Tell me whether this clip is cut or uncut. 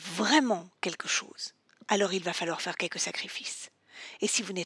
uncut